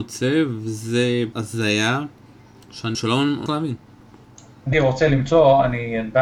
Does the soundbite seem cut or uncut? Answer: cut